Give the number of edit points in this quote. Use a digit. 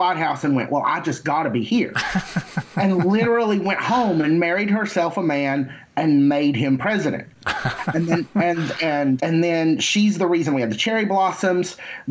1